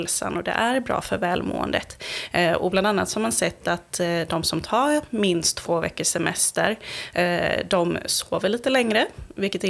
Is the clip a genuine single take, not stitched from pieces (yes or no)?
yes